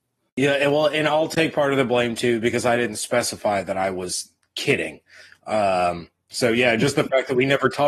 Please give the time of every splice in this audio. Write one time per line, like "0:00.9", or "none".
none